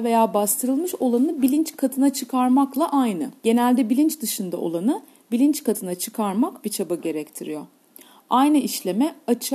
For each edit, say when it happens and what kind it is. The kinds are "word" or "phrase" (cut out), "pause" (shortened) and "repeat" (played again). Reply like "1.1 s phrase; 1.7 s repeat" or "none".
3.4 s pause; 6.6 s word